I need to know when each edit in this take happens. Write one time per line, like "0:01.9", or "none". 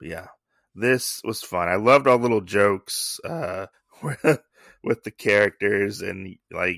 0:03.7